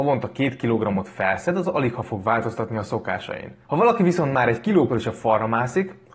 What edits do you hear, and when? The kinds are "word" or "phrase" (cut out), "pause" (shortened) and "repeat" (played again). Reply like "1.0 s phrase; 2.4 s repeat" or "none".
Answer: 3.6 s pause; 4.9 s word